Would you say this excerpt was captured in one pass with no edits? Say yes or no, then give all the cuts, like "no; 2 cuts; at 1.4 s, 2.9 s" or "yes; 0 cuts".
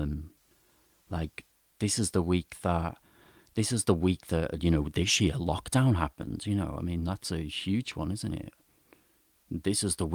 yes; 0 cuts